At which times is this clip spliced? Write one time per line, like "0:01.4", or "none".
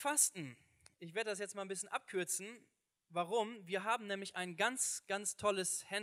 none